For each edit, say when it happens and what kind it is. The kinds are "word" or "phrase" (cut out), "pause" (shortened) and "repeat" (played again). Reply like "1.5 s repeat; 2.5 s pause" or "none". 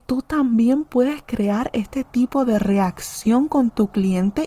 none

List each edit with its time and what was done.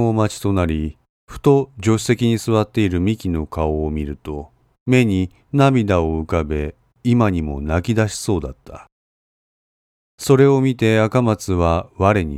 none

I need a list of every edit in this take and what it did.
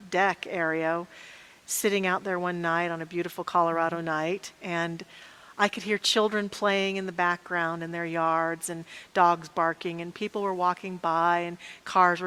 none

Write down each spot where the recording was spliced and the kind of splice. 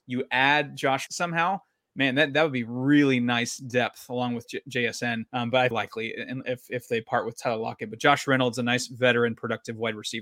1.1 s phrase; 5.3 s pause; 5.7 s phrase

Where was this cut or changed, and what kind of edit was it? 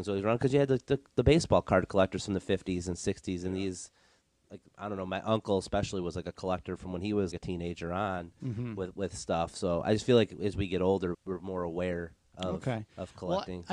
7.3 s word; 11.1 s word

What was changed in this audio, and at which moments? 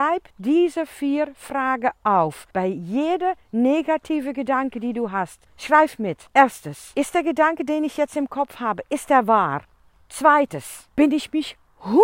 2.5 s pause; 5.5 s pause; 6.3 s pause; 9.7 s pause

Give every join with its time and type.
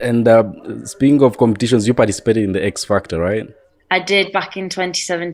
none

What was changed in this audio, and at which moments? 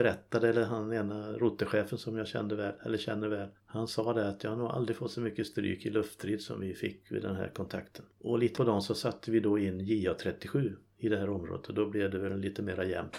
3.6 s pause; 8.1 s pause; 8.5 s word

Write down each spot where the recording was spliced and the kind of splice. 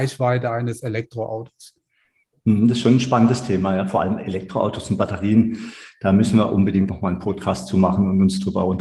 6.9 s word

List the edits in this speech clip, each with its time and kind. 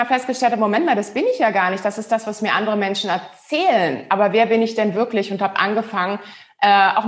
none

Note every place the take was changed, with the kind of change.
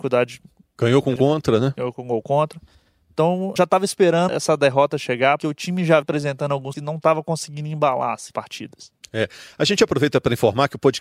1.2 s word; 3.6 s word; 4.3 s word; 5.4 s word; 6.0 s word; 6.7 s word; 8.3 s word

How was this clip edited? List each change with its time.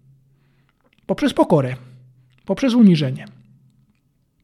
none

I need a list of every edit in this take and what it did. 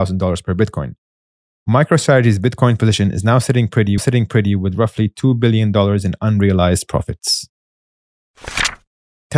4.0 s repeat

